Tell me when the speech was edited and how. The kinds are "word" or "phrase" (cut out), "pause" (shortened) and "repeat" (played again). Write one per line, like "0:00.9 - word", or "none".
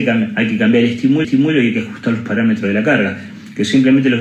0:01.2 - repeat